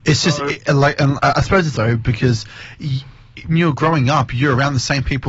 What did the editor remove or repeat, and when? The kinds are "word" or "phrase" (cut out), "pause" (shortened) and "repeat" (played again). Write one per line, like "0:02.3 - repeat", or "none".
0:01.2 - word
0:01.7 - word
0:03.5 - word

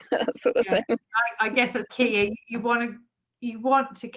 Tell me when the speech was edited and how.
0:01.9 - word

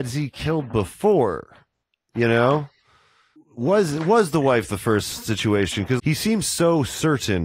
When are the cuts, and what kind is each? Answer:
0:03.4 - word
0:06.0 - word

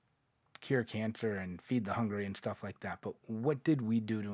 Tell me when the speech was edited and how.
none

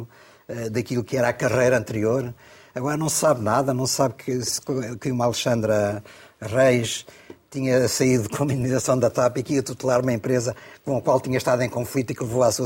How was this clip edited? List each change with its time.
none

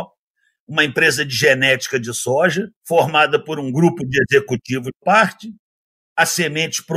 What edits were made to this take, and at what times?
0:02.8 - pause
0:05.0 - phrase

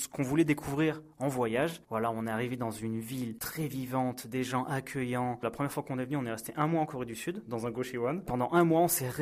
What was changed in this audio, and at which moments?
none

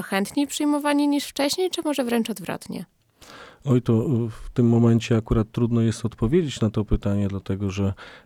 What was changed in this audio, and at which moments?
none

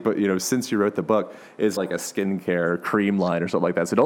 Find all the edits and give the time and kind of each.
0:01.8 - word

